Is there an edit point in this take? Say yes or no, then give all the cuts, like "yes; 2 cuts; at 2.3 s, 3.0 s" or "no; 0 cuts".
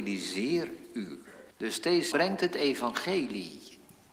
yes; 2 cuts; at 1.5 s, 2.1 s